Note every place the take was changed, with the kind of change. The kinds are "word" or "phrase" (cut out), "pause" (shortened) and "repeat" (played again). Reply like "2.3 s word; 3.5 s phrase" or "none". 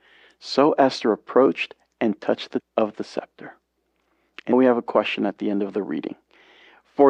2.6 s word; 4.5 s word